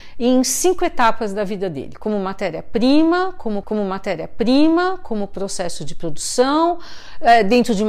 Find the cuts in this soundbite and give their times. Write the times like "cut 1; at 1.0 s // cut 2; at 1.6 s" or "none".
cut 1; at 3.6 s

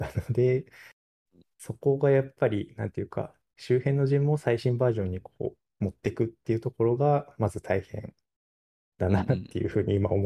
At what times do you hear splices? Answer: none

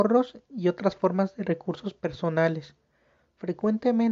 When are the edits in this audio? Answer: none

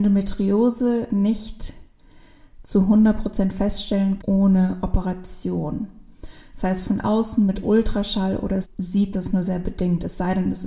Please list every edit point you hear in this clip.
cut 1; at 4.2 s // cut 2; at 8.6 s // cut 3; at 9.1 s // cut 4; at 9.4 s

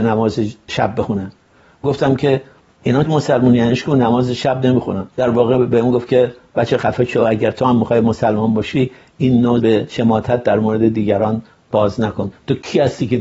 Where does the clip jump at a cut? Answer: cut 1; at 1.8 s // cut 2; at 3.1 s // cut 3; at 5.1 s // cut 4; at 9.6 s

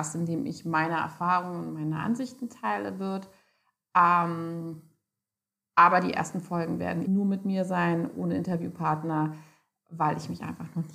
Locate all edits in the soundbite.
cut 1; at 7.1 s

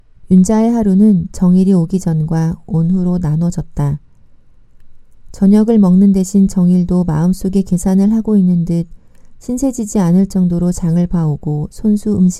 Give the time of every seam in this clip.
none

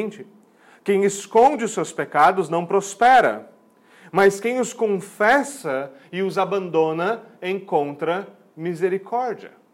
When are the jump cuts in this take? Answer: none

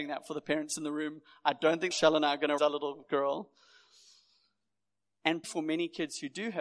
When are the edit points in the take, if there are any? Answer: cut 1; at 1.9 s // cut 2; at 2.6 s // cut 3; at 5.4 s

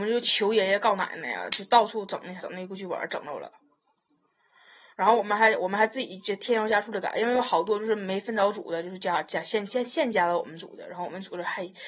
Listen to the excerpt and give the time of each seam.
cut 1; at 2.4 s

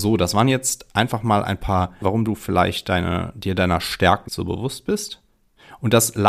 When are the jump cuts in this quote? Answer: cut 1; at 2.0 s // cut 2; at 4.3 s

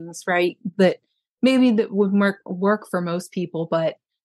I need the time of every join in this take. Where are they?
none

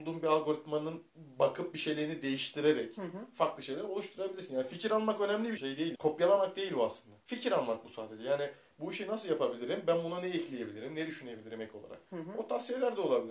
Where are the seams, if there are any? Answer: cut 1; at 1.1 s // cut 2; at 5.6 s // cut 3; at 5.9 s // cut 4; at 7.2 s

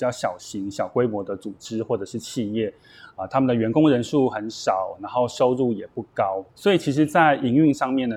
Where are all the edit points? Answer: cut 1; at 6.5 s

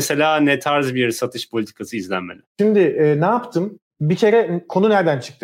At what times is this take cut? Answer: cut 1; at 2.5 s // cut 2; at 3.9 s

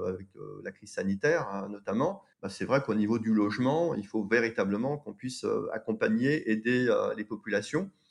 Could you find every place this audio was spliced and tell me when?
cut 1; at 2.3 s

